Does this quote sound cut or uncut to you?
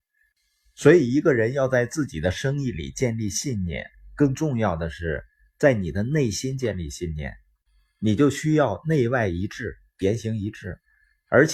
uncut